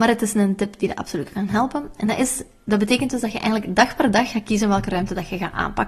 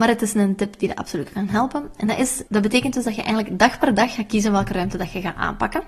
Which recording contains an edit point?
second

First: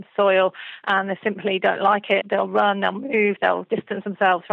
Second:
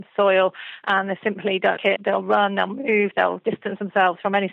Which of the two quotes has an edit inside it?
second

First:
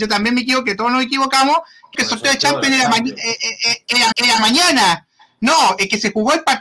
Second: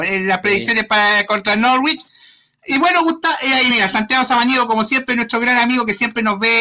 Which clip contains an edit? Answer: first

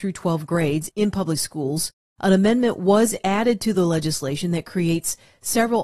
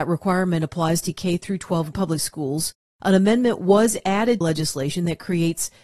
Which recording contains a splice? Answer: second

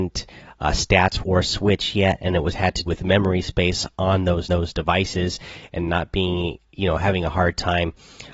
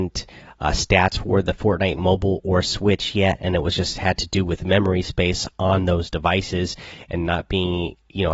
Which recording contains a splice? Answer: first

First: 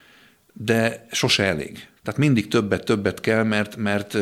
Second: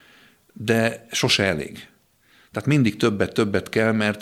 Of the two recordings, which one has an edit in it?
first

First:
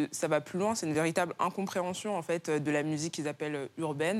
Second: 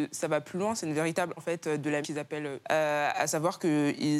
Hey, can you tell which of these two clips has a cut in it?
second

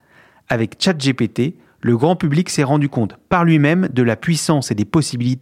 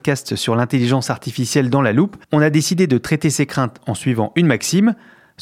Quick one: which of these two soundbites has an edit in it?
second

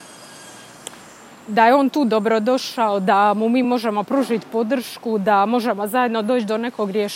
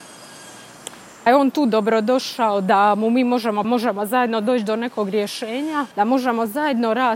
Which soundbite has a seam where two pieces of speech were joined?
second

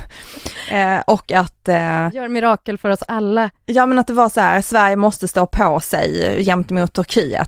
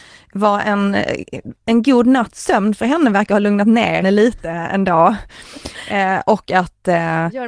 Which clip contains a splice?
second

